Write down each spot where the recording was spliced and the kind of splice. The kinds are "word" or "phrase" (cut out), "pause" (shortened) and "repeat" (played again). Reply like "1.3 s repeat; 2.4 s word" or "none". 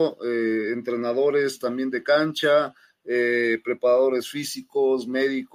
none